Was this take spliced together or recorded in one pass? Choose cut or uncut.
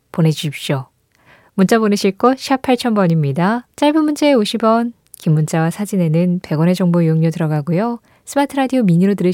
cut